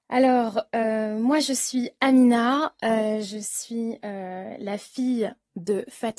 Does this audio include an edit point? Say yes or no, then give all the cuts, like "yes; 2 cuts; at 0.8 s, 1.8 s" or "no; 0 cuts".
no; 0 cuts